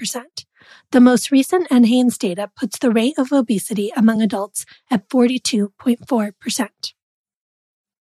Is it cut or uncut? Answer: uncut